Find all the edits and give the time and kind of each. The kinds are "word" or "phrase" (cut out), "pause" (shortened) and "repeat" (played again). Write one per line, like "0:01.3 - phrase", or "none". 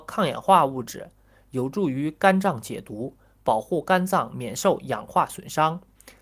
none